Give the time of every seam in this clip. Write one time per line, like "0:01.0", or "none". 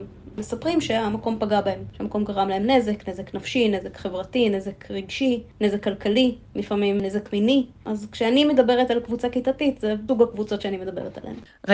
none